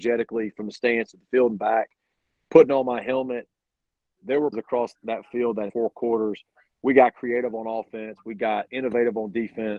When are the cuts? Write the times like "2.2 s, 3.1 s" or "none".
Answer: 4.5 s, 4.9 s, 5.7 s